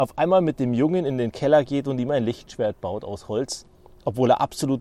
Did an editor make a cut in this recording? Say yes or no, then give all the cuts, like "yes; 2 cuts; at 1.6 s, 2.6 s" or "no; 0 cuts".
no; 0 cuts